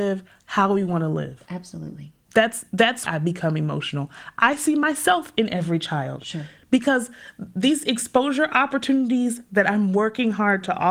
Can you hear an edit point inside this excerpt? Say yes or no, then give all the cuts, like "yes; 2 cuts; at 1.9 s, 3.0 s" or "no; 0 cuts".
yes; 2 cuts; at 2.2 s, 3.1 s